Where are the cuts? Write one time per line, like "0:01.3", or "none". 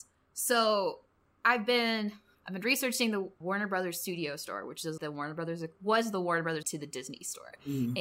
0:02.3
0:03.4
0:05.0
0:06.6